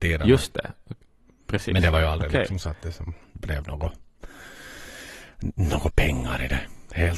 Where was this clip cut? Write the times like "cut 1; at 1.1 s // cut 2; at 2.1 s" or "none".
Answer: none